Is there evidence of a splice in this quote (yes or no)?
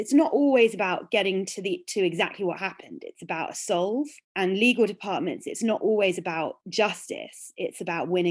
yes